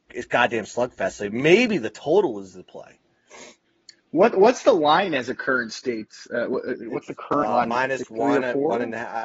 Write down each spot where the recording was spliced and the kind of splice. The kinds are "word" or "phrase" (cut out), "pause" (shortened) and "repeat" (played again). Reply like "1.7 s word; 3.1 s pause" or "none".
none